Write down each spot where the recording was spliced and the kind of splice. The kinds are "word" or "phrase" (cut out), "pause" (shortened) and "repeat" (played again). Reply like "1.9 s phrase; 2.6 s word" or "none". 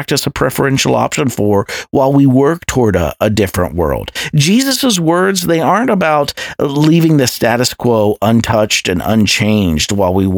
none